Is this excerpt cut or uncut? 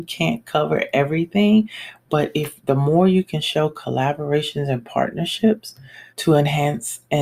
cut